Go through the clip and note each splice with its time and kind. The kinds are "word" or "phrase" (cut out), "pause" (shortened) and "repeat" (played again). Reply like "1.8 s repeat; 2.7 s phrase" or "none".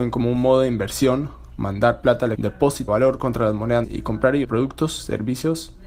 2.3 s word; 2.9 s word; 3.8 s word; 4.4 s word